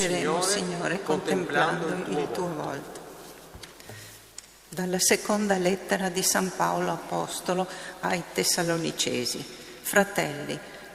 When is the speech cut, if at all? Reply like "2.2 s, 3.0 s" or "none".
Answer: none